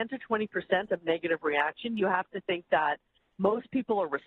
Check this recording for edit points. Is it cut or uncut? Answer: uncut